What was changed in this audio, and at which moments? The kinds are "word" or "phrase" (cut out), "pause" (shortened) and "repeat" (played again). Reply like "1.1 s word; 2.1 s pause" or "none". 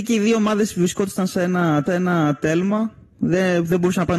1.9 s repeat